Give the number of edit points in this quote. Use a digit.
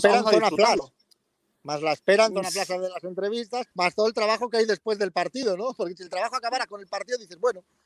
1